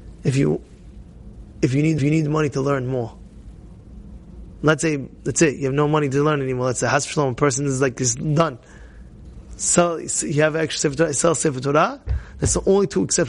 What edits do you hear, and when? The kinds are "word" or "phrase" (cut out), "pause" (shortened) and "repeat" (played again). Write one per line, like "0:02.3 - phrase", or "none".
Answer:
0:02.0 - repeat